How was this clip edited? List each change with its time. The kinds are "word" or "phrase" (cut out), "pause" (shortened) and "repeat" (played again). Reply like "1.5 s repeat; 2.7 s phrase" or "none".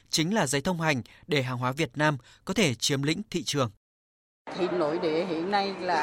4.7 s word